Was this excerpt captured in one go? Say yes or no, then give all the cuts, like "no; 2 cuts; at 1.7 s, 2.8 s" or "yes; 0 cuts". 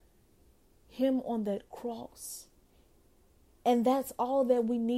yes; 0 cuts